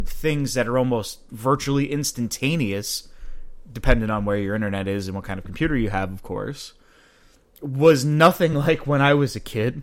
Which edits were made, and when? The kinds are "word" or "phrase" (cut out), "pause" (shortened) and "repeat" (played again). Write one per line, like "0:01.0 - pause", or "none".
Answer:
none